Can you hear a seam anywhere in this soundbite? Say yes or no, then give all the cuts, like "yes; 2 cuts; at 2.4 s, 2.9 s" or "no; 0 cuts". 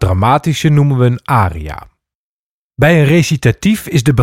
no; 0 cuts